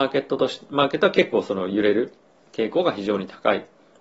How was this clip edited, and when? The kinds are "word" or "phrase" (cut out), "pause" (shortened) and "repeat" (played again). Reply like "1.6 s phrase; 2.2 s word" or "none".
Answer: none